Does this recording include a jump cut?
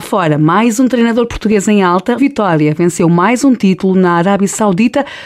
yes; 1 cut; at 2.2 s

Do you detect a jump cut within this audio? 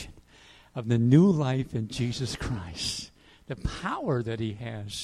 no; 0 cuts

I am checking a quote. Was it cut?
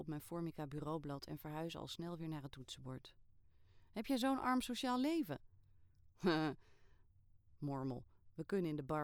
no; 0 cuts

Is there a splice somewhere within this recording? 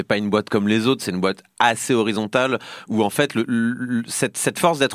yes; 1 cut; at 3.5 s

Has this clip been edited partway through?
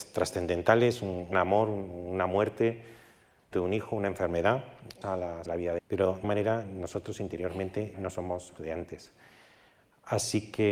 yes; 8 cuts; at 1.3 s, 3.5 s, 5.0 s, 5.5 s, 5.8 s, 6.2 s, 7.9 s, 8.6 s

